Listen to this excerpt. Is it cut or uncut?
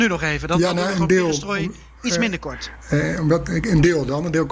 uncut